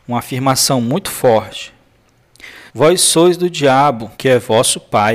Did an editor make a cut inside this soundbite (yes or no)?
yes